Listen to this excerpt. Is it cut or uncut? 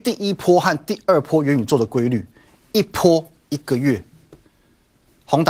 uncut